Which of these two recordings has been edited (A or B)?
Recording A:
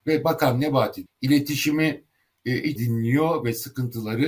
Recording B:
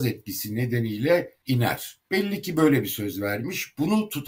A